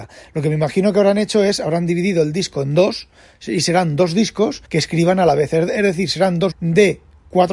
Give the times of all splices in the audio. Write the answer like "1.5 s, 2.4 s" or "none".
4.6 s, 6.5 s